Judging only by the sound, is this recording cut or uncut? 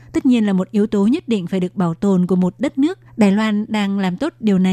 cut